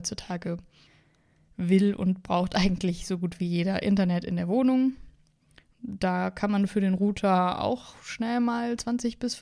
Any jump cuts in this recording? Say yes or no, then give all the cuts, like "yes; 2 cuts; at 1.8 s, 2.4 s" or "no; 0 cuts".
no; 0 cuts